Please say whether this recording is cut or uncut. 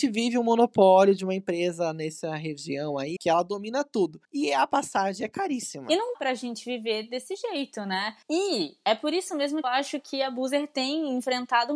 cut